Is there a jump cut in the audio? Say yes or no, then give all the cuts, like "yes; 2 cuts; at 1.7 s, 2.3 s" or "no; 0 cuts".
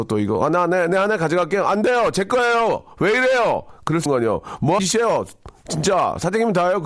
yes; 2 cuts; at 4.1 s, 4.8 s